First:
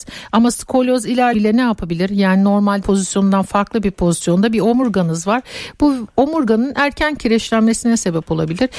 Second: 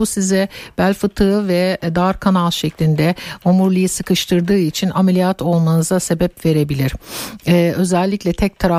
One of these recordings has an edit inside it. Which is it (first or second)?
first